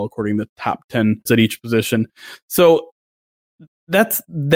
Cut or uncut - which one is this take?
cut